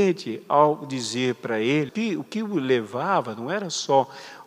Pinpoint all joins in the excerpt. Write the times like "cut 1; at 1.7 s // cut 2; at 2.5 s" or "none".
cut 1; at 1.9 s